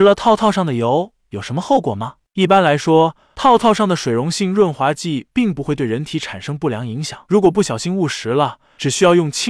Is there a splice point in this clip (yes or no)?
yes